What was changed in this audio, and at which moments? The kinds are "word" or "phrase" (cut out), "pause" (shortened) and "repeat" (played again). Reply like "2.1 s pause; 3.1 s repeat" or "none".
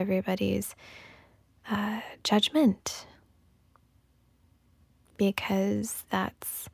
none